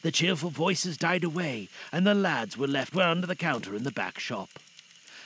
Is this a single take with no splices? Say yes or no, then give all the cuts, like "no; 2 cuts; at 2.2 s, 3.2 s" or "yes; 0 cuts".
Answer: no; 1 cut; at 2.9 s